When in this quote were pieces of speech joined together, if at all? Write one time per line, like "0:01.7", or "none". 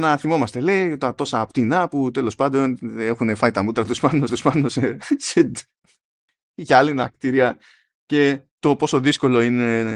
0:04.3
0:08.5